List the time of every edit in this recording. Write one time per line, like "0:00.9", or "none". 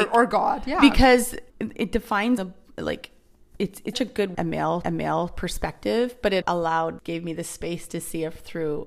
0:01.5
0:02.4
0:03.9
0:04.3
0:04.8
0:06.4
0:07.0